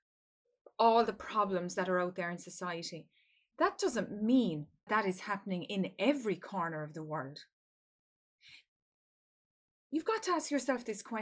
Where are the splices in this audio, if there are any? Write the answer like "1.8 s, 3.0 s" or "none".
4.9 s